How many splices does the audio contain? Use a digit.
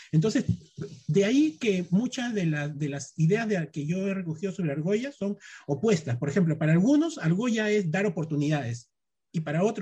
0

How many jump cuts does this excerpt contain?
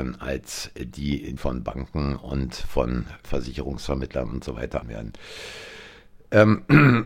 3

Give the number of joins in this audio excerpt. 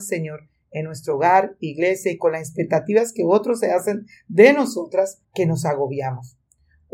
1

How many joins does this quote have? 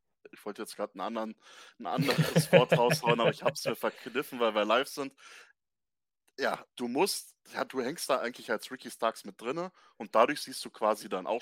2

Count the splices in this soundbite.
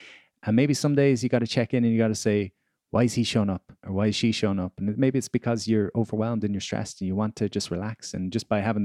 1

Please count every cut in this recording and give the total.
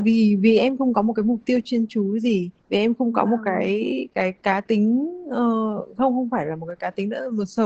1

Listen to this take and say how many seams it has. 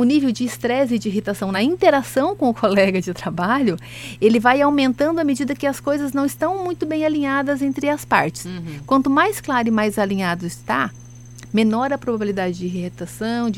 0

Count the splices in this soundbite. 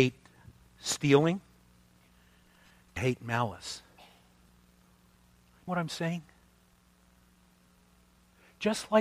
2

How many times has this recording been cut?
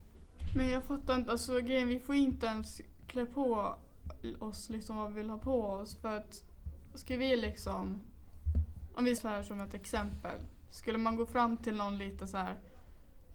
1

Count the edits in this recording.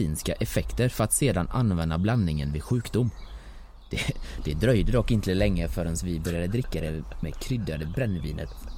0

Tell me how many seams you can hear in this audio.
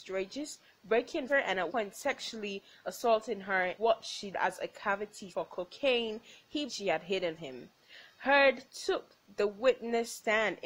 7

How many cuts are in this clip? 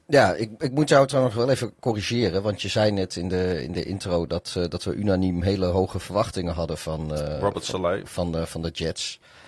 0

